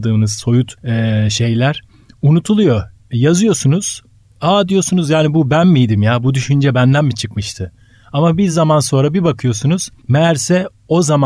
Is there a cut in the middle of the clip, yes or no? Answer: no